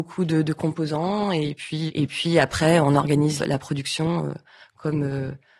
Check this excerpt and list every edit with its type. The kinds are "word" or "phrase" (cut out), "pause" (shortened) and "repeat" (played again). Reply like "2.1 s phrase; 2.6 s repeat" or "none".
1.9 s word; 3.4 s word

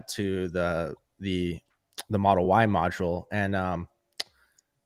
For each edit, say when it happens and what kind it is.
none

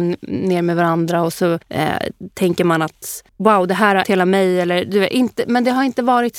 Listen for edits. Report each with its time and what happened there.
1.6 s pause; 3.3 s pause; 4.0 s word

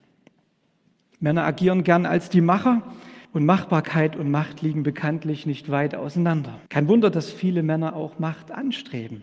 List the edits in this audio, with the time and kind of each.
3.2 s pause; 6.7 s pause

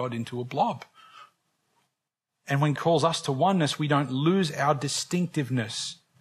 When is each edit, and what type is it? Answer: 2.8 s word

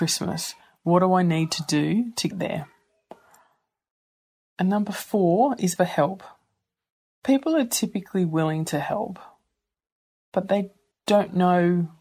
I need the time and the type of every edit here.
2.3 s word; 5.8 s word; 10.9 s word

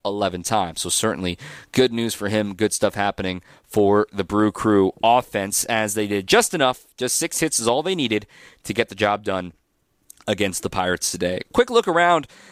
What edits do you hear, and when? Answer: none

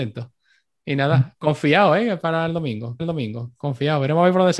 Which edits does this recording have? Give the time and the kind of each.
3.0 s repeat

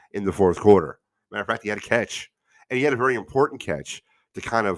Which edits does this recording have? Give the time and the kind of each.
none

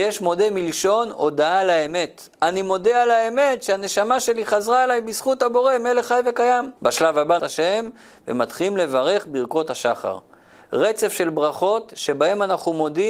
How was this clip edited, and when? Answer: 6.8 s pause; 7.4 s phrase

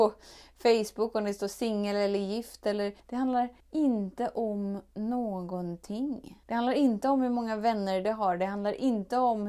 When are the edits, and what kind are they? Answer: 3.0 s pause; 3.6 s pause; 6.4 s pause

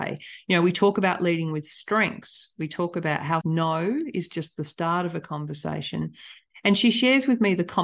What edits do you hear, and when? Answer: 3.4 s word

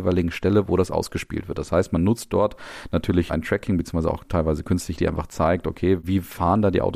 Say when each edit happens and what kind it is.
3.3 s word; 5.0 s word

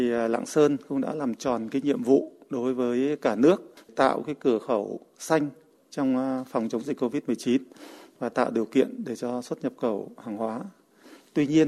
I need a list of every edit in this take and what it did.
none

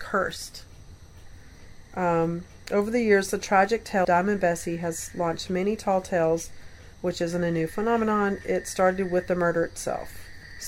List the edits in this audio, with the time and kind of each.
4.0 s word; 6.9 s pause

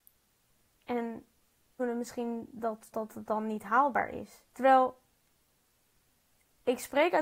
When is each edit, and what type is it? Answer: 1.8 s word; 2.9 s word; 4.5 s pause

